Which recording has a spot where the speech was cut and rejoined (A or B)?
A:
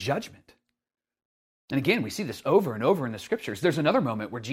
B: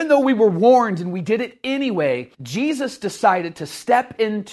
B